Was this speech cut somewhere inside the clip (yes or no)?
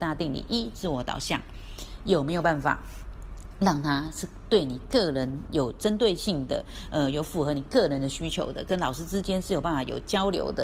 no